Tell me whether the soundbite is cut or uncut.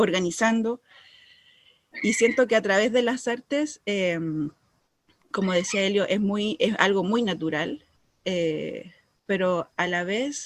uncut